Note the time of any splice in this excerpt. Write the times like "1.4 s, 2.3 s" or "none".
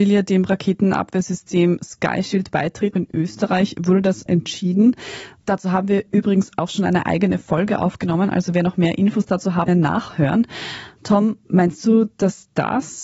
2.9 s, 4.3 s, 9.7 s